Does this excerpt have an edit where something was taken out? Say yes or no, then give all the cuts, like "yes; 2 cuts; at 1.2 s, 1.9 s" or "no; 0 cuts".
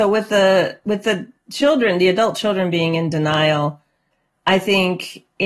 no; 0 cuts